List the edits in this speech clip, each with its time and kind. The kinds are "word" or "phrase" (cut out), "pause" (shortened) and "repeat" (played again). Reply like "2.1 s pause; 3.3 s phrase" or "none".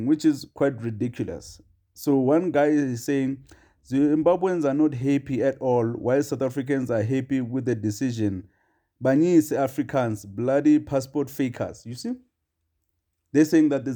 none